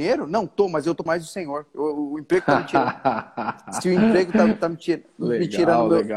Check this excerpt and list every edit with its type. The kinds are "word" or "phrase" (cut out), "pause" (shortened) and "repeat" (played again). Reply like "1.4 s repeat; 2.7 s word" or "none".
1.1 s word